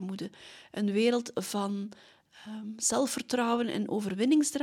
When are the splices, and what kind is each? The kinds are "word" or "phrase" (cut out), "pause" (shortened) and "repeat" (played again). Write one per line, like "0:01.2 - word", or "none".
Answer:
none